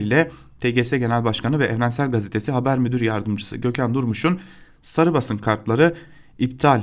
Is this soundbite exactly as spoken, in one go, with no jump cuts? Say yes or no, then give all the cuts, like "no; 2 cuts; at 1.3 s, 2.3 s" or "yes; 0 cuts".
yes; 0 cuts